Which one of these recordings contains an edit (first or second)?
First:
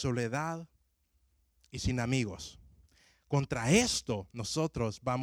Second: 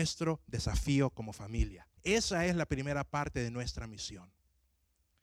second